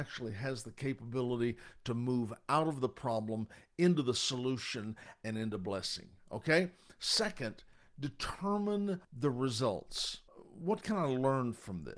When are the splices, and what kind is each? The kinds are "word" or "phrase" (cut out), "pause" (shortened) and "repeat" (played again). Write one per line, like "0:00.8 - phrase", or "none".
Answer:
0:09.0 - pause
0:10.3 - pause